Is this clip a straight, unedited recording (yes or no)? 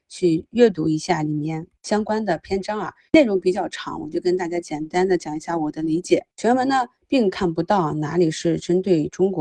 no